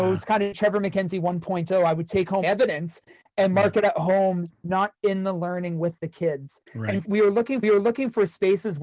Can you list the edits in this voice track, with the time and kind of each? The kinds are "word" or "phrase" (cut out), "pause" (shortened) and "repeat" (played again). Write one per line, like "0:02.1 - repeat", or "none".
0:02.4 - phrase
0:06.7 - pause
0:07.0 - word
0:07.6 - repeat